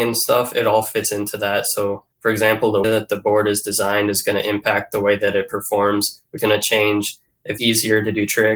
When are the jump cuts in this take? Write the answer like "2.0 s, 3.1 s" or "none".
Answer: 2.1 s, 2.8 s, 6.4 s, 7.6 s